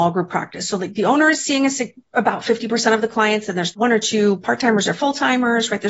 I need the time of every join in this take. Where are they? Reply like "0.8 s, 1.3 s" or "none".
3.7 s